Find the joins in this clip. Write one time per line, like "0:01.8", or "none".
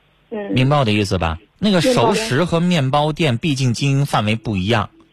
0:01.5